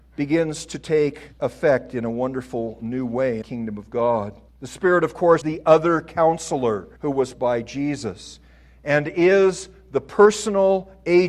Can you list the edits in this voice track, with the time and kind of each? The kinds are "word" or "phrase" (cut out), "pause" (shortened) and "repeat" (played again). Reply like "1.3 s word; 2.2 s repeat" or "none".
1.3 s pause; 3.4 s phrase; 4.5 s pause; 5.4 s word; 7.0 s pause; 7.3 s word